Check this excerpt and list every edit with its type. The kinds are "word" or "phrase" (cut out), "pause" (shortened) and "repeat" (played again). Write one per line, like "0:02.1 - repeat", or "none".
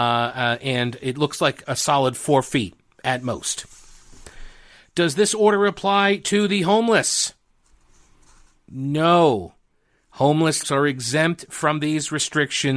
0:01.6 - word
0:10.6 - word